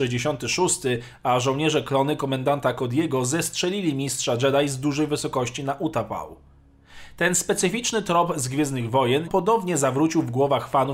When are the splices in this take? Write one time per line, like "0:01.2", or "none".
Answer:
0:09.3